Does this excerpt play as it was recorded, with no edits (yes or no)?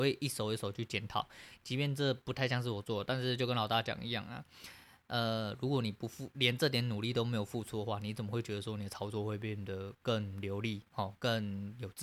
yes